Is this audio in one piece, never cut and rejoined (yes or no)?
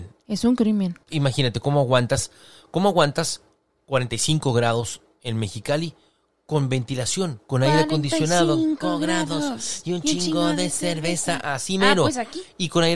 no